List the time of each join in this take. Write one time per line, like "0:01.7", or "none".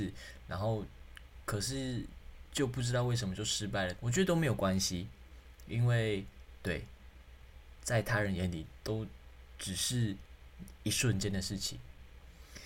0:04.0

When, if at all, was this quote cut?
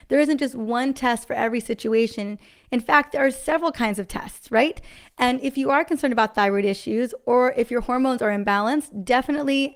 none

